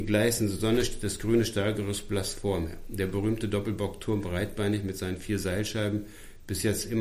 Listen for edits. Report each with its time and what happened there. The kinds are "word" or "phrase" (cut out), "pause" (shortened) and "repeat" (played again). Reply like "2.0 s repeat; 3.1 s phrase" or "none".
none